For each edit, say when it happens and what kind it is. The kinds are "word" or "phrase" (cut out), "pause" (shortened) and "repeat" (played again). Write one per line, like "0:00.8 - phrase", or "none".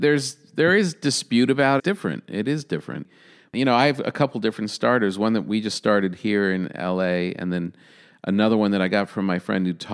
0:01.8 - phrase